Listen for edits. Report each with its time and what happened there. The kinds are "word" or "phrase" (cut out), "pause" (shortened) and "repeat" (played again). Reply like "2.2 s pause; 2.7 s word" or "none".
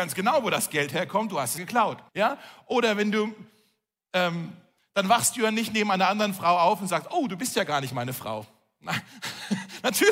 1.6 s word; 2.1 s pause; 4.8 s phrase